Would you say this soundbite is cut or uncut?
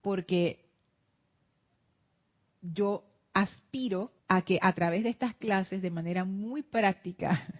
cut